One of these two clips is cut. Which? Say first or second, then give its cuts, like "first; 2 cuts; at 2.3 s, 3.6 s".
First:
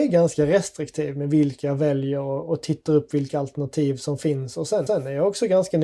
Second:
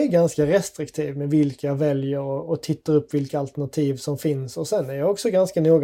first; 1 cut; at 4.9 s